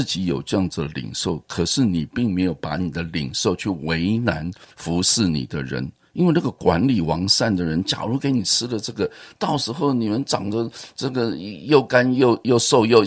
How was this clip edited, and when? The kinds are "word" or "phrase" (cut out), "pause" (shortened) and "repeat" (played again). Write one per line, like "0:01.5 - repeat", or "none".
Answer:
0:04.7 - pause